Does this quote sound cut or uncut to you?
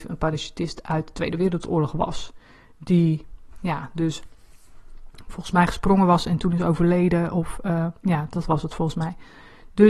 uncut